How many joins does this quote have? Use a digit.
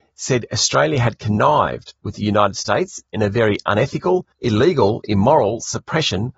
1